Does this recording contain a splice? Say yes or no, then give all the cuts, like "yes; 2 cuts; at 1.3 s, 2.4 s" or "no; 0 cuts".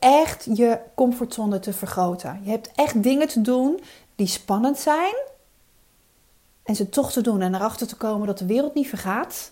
no; 0 cuts